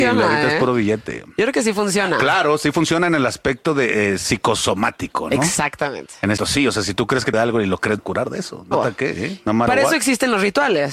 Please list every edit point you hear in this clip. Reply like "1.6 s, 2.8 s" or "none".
6.4 s, 7.3 s, 8.0 s, 8.7 s